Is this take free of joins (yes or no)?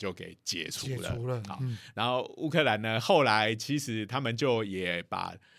yes